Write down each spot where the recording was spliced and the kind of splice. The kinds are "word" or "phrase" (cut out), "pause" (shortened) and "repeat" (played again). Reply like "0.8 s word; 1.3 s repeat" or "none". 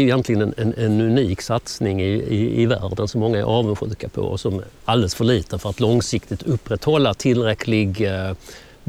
none